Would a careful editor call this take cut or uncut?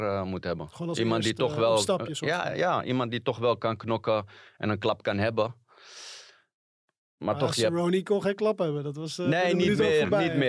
uncut